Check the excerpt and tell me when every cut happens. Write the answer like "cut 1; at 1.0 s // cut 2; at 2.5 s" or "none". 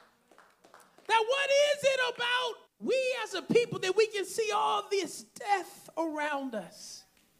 cut 1; at 2.7 s